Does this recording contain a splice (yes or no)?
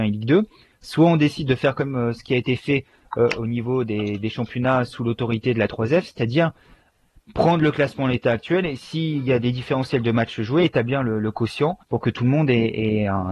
yes